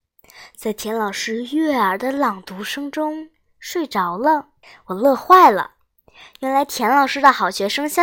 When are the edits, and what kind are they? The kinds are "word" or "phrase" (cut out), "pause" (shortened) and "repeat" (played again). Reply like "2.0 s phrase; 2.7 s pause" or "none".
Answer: 4.6 s pause